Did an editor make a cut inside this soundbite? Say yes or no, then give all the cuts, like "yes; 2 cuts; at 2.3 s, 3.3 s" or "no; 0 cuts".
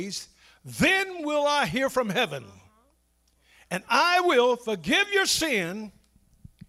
no; 0 cuts